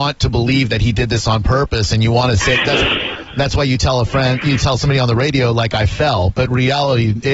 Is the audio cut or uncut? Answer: uncut